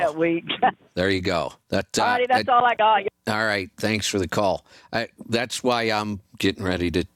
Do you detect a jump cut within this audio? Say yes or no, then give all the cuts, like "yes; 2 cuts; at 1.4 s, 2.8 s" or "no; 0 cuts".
no; 0 cuts